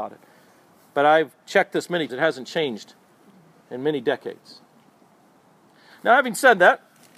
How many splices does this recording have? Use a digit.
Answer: 1